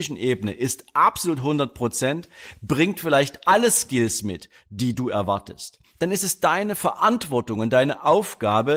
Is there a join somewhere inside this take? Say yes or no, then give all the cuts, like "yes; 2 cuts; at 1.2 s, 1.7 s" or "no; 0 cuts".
no; 0 cuts